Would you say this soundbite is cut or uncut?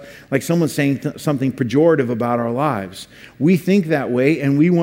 uncut